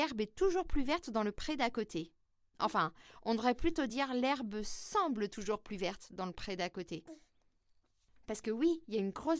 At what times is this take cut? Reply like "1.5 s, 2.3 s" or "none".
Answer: none